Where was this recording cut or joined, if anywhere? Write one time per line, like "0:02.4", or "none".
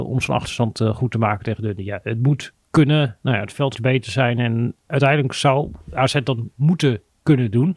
0:03.7